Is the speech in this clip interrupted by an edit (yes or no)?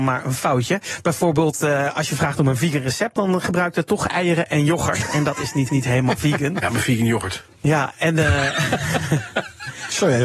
yes